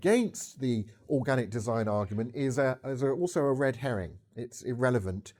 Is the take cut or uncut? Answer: uncut